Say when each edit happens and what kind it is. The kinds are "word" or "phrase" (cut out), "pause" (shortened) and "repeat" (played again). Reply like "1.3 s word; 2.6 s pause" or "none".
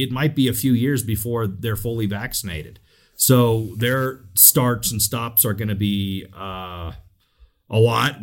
none